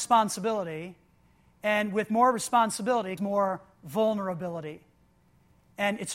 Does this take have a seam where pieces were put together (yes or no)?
yes